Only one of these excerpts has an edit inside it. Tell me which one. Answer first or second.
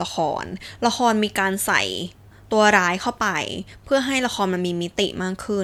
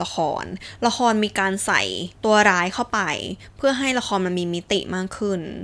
second